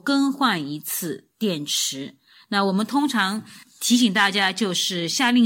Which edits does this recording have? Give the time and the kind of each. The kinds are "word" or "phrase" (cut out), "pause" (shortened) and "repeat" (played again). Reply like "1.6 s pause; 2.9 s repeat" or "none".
none